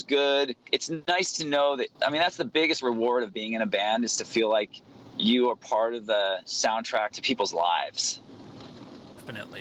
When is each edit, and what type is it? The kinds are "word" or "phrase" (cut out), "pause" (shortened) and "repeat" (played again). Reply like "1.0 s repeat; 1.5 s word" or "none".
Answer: 1.9 s pause